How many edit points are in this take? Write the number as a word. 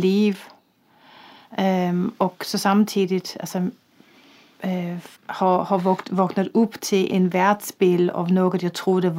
two